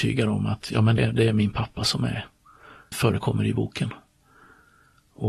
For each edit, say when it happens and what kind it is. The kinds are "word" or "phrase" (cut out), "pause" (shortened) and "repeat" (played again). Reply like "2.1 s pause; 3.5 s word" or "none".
1.0 s word; 2.9 s word